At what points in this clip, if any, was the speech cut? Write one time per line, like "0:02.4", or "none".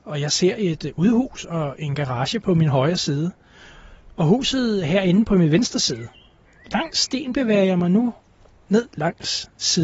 none